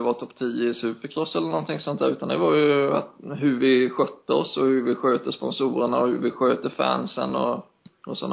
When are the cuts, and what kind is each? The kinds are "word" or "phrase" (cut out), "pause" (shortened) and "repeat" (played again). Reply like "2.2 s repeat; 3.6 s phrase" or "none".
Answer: none